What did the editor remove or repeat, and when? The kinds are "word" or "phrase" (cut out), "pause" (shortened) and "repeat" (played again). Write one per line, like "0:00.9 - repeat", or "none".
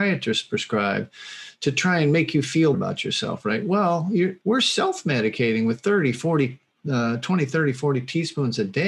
0:02.7 - word
0:04.4 - pause